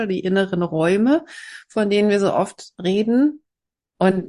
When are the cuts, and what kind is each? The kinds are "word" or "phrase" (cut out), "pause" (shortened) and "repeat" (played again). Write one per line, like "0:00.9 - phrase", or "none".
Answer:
none